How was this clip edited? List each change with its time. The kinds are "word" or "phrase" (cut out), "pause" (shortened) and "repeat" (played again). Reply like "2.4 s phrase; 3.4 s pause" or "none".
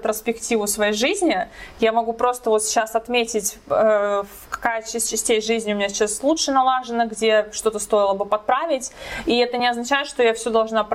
none